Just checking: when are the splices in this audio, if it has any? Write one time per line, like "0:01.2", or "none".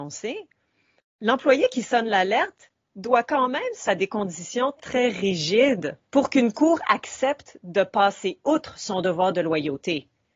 0:03.8
0:04.8
0:06.0